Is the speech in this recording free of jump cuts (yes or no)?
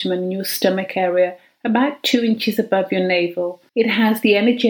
no